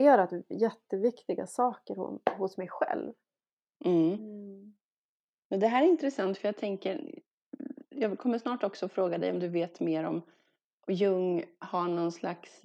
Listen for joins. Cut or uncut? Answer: uncut